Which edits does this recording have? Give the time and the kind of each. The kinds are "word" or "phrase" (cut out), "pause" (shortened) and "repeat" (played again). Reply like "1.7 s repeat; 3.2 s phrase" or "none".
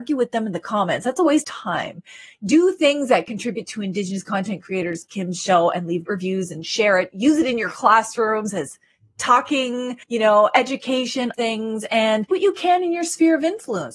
1.4 s word; 5.1 s word; 6.1 s word; 10.0 s pause; 11.3 s phrase; 12.3 s word